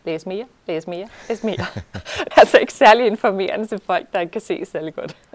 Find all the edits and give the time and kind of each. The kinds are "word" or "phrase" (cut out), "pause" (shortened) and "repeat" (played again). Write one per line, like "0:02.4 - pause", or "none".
0:02.3 - word